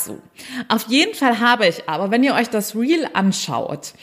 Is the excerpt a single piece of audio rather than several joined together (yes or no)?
yes